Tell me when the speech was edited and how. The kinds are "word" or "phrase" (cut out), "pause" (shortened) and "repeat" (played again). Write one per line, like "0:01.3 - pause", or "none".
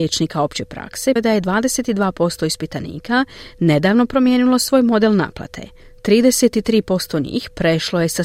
0:01.2 - word